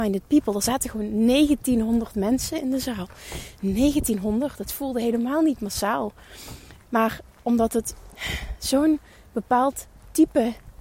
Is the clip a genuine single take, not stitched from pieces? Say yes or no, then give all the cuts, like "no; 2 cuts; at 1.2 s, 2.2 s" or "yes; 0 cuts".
yes; 0 cuts